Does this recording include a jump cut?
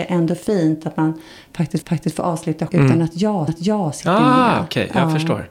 yes; 3 cuts; at 1.8 s, 2.7 s, 3.5 s

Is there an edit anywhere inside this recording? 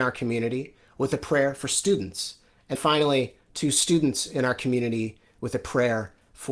yes; 1 cut; at 2.8 s

